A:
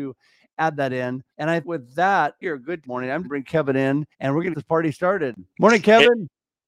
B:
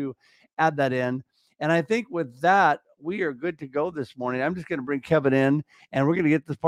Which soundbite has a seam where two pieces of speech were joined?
A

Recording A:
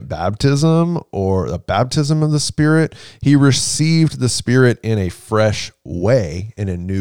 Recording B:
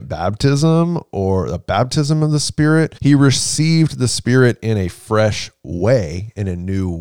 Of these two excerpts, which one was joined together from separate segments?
B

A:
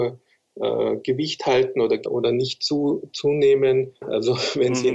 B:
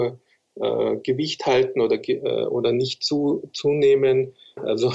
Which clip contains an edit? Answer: A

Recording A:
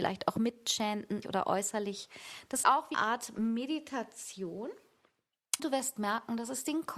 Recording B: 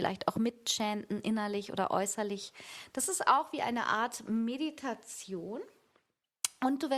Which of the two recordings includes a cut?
A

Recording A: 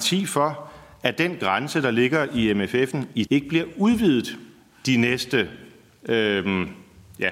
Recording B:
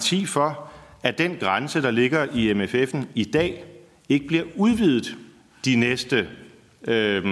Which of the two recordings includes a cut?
A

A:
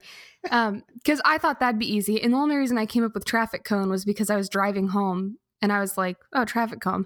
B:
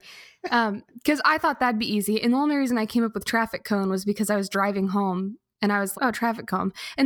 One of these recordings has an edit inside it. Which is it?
B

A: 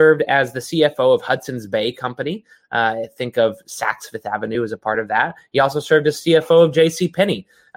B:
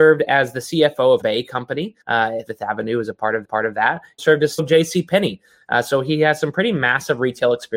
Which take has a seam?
B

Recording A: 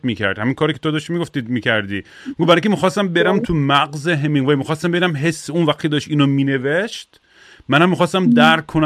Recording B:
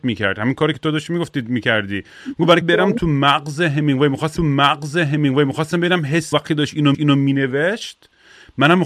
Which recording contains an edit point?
B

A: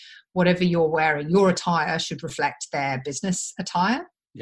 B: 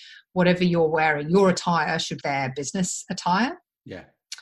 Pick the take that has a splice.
B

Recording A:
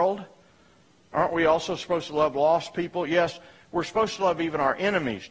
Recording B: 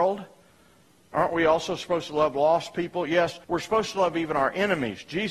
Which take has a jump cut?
B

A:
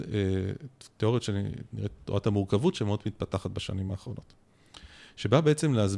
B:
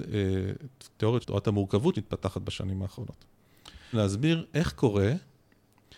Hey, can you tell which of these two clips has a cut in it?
B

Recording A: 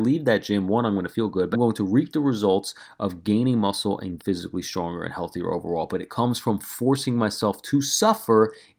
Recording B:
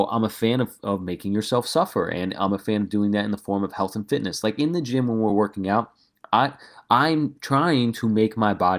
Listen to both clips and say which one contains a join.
A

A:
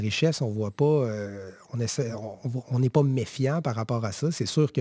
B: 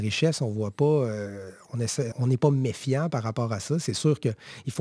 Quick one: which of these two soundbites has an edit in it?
B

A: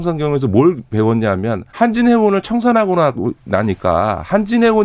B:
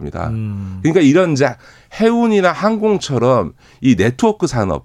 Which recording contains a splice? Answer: A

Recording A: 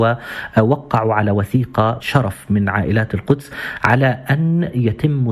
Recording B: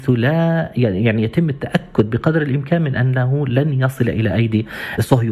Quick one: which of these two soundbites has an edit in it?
A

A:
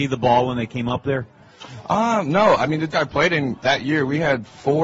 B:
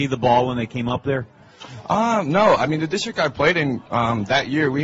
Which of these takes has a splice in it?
A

